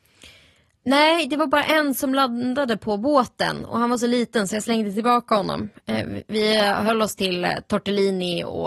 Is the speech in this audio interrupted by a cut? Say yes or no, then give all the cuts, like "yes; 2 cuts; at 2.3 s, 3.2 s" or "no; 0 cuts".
no; 0 cuts